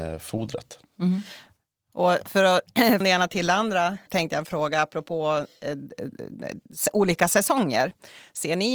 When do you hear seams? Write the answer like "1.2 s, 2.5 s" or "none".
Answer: 3.0 s, 4.1 s